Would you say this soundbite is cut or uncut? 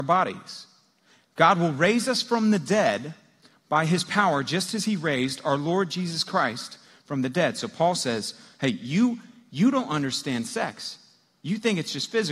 uncut